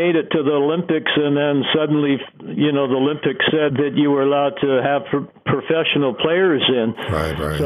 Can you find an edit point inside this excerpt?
yes; 1 cut; at 3.7 s

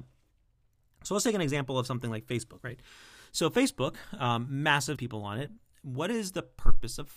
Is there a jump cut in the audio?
yes; 1 cut; at 5.0 s

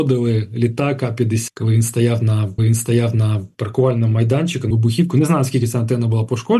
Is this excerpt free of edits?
no; 3 cuts; at 1.5 s, 2.6 s, 4.7 s

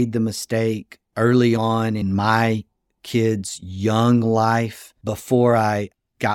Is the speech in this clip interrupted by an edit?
no; 0 cuts

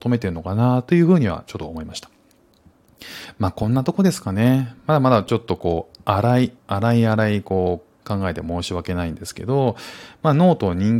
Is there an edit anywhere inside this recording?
yes; 2 cuts; at 6.6 s, 8.0 s

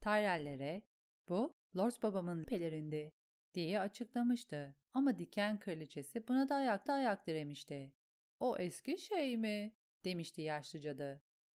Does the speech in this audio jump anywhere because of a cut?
yes; 3 cuts; at 2.4 s, 4.8 s, 6.9 s

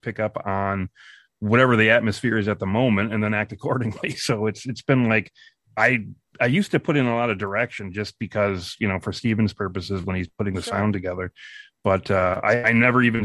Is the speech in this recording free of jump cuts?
yes; 0 cuts

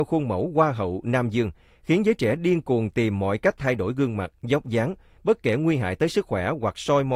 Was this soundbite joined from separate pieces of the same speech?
no; 0 cuts

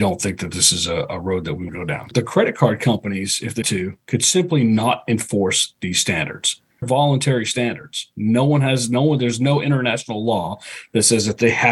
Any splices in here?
yes; 3 cuts; at 1.7 s, 3.6 s, 6.8 s

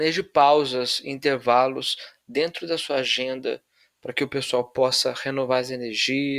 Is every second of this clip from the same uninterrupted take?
yes; 0 cuts

